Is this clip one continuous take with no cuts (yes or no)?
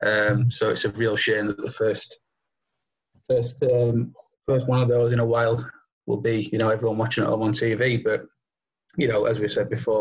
yes